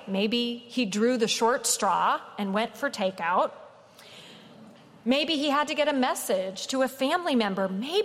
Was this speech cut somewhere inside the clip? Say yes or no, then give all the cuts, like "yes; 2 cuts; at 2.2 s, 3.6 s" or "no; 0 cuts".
no; 0 cuts